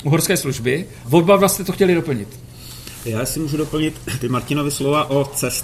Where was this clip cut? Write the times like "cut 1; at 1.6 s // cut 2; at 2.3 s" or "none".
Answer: cut 1; at 1.0 s